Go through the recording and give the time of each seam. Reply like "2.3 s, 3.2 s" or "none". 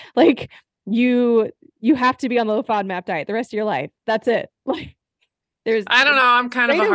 none